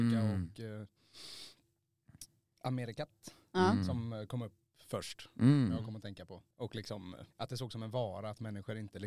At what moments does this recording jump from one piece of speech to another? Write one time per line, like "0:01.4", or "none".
0:06.5
0:07.3